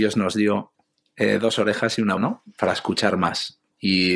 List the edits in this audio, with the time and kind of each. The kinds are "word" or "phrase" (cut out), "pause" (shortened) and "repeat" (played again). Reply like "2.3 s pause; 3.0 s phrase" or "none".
2.2 s word